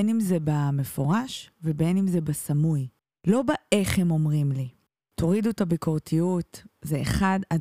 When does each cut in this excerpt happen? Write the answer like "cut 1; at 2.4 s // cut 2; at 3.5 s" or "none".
none